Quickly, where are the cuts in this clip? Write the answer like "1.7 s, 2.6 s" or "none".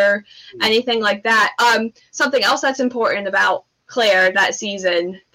none